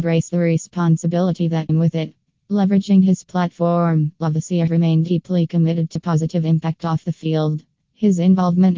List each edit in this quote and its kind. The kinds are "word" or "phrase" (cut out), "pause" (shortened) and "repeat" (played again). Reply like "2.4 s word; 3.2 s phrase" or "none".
1.7 s word; 4.7 s word; 6.0 s word